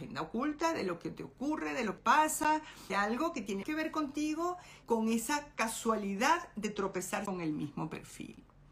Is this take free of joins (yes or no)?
no